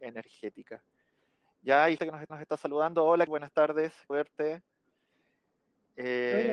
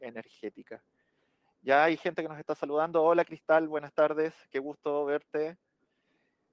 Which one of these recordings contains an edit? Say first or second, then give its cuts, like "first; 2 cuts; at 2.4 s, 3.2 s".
first; 4 cuts; at 2.0 s, 2.3 s, 3.3 s, 4.1 s